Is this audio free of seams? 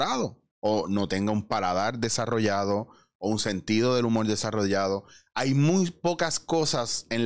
yes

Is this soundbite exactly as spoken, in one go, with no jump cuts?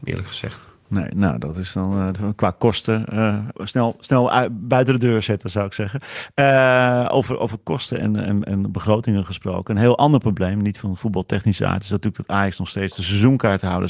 no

